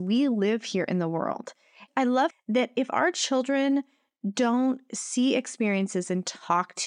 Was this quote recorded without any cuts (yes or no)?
no